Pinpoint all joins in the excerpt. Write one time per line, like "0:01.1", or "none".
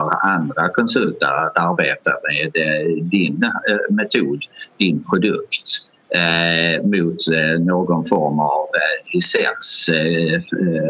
none